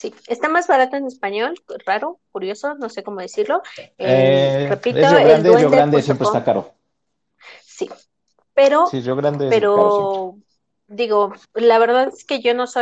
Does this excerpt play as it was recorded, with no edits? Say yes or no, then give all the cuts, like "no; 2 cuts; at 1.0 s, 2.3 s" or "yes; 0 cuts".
yes; 0 cuts